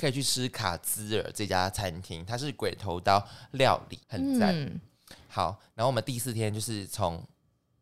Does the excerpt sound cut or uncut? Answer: cut